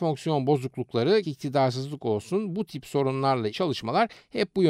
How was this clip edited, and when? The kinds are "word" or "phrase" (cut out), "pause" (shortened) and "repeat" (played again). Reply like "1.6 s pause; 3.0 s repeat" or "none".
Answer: 1.2 s word; 3.5 s word